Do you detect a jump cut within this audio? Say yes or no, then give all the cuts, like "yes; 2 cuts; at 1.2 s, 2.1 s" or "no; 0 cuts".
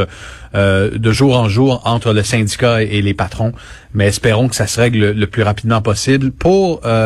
no; 0 cuts